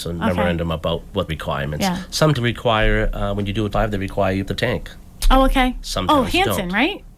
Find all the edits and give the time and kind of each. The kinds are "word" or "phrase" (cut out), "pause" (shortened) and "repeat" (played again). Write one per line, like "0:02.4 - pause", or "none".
0:01.3 - phrase
0:02.3 - word
0:03.7 - word
0:04.4 - word